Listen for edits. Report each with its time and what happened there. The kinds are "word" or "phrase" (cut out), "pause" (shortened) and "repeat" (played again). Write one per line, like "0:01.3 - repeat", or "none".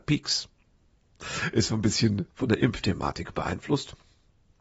0:02.3 - pause